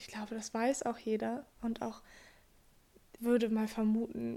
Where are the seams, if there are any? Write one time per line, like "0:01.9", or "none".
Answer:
0:03.2